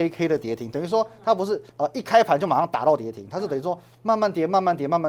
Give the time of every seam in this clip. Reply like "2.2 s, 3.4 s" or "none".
1.7 s